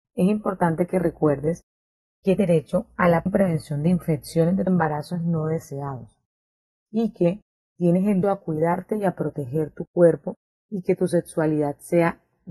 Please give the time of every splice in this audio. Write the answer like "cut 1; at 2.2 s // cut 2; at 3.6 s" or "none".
cut 1; at 2.4 s // cut 2; at 3.3 s // cut 3; at 4.7 s // cut 4; at 8.2 s